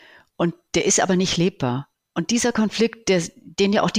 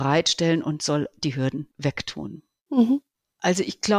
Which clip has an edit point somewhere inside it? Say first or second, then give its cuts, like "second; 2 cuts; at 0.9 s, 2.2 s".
second; 1 cut; at 1.7 s